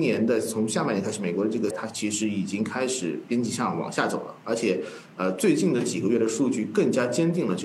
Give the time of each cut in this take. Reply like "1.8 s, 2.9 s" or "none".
1.7 s